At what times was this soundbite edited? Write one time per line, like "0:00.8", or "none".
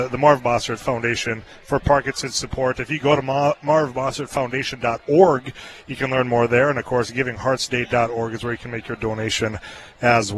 none